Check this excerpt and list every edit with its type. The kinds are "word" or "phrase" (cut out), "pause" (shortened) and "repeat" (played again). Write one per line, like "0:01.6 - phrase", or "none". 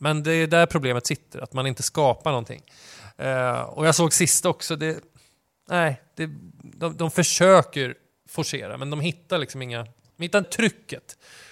0:10.4 - phrase